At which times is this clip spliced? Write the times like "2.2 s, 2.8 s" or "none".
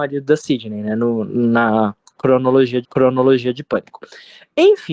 2.8 s